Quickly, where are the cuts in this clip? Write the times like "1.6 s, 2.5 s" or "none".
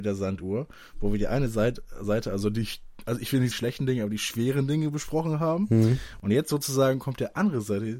3.5 s